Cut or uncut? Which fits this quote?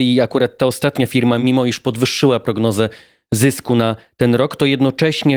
uncut